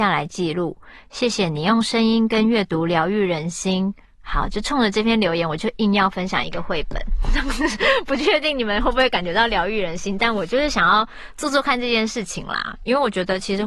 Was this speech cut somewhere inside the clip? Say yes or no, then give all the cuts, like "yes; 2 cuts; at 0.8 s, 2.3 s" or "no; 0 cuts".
yes; 1 cut; at 4.1 s